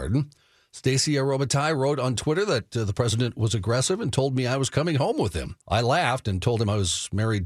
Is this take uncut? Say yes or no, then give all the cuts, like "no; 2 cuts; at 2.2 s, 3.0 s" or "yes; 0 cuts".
no; 1 cut; at 5.6 s